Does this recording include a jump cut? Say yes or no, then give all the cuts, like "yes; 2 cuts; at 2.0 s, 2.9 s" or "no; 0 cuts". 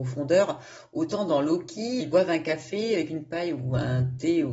yes; 1 cut; at 2.0 s